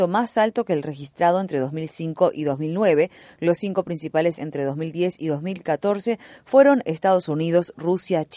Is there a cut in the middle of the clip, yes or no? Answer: yes